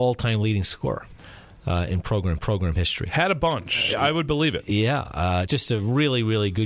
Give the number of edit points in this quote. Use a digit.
3